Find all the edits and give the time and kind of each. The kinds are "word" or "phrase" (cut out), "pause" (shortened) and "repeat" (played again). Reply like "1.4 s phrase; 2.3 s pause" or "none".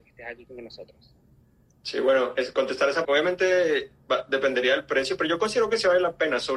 3.0 s phrase